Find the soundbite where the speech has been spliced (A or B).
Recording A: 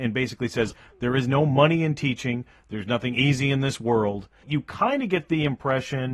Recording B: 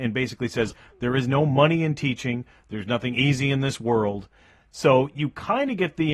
A